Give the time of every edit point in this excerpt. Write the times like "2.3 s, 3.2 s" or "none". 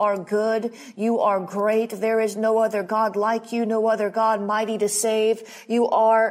none